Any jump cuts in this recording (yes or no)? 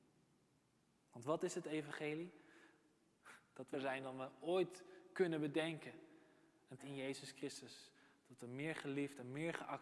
yes